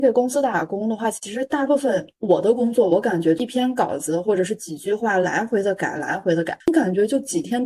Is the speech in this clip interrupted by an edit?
yes; 2 cuts; at 2.2 s, 6.6 s

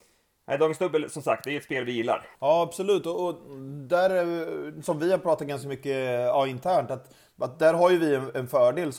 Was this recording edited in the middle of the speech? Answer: yes; 1 cut; at 2.3 s

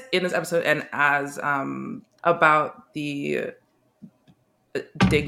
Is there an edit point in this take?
yes; 1 cut; at 2.2 s

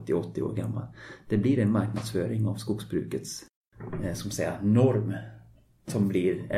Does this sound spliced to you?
no; 0 cuts

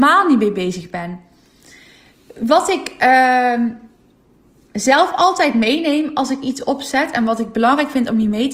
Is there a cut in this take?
no; 0 cuts

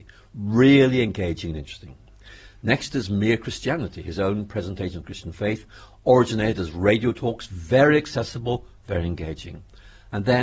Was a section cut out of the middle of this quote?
no; 0 cuts

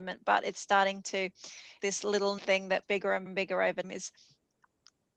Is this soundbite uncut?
no; 5 cuts; at 1.8 s, 2.4 s, 2.8 s, 3.3 s, 3.8 s

